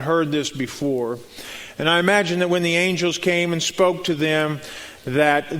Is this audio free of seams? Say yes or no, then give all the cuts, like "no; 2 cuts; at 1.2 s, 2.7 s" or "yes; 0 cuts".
yes; 0 cuts